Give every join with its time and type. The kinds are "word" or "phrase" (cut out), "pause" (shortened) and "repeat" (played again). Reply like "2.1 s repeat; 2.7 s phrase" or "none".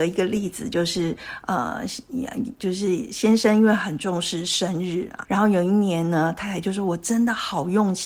5.2 s word